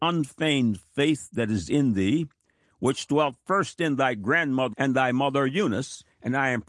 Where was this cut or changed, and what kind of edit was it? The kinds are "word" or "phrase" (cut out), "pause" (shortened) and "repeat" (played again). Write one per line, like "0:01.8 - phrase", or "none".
0:04.7 - word